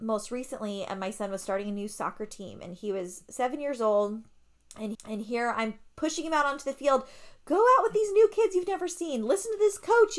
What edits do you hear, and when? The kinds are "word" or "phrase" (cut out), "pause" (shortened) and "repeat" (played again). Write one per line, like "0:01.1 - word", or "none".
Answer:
0:04.9 - repeat